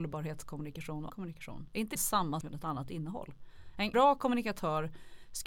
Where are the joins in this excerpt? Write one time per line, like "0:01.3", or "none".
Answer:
0:01.1
0:02.0
0:02.4
0:03.9